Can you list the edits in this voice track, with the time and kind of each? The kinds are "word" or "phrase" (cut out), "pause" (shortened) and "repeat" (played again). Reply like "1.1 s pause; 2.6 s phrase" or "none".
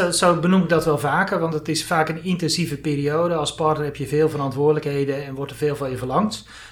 none